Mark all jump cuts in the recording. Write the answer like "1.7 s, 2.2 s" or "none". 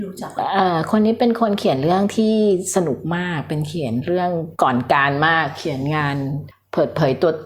4.5 s

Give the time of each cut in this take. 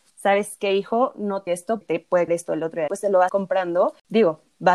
1.5 s, 1.8 s, 2.3 s, 2.9 s, 3.3 s

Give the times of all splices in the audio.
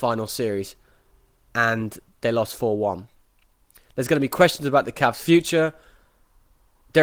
none

